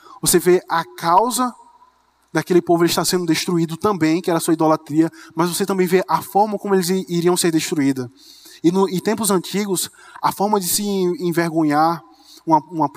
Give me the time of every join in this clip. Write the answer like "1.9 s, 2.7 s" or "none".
none